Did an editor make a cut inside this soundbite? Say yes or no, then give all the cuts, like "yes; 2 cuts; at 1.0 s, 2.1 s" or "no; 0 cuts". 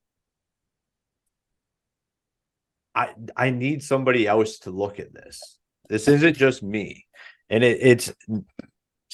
no; 0 cuts